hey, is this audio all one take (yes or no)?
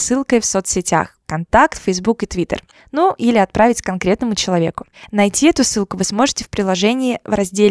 yes